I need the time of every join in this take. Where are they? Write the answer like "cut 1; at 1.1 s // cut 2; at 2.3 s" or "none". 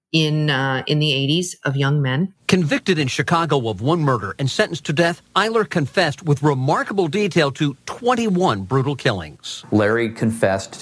cut 1; at 5.3 s